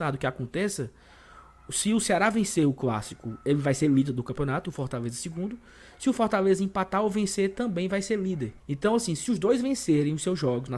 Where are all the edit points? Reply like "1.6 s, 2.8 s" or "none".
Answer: 8.6 s